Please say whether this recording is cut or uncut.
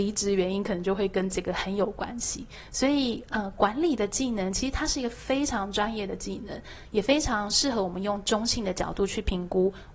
uncut